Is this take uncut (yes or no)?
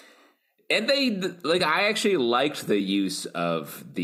yes